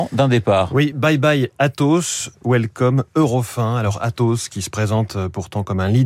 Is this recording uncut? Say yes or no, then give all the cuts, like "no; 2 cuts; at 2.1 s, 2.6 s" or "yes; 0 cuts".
yes; 0 cuts